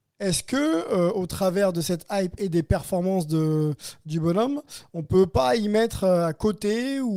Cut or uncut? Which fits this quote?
uncut